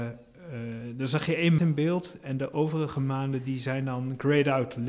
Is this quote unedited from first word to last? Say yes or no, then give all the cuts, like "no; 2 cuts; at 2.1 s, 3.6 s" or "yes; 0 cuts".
no; 1 cut; at 1.6 s